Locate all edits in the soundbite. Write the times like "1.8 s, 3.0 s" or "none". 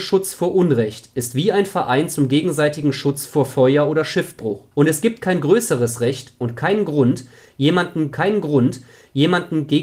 4.7 s, 8.1 s